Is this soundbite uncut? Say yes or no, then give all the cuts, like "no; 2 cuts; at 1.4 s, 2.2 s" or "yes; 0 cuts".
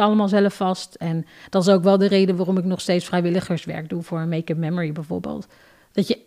yes; 0 cuts